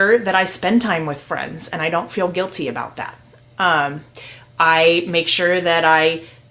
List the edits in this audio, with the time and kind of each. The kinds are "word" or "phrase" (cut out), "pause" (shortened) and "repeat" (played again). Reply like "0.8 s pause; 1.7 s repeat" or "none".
none